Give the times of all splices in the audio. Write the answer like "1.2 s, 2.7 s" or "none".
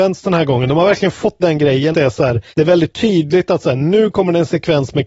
1.4 s, 1.9 s, 2.5 s